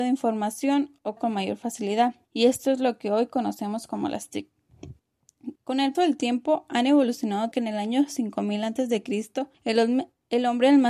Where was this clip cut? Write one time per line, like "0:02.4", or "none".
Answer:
0:01.2
0:02.2
0:05.6
0:05.9
0:07.5
0:09.5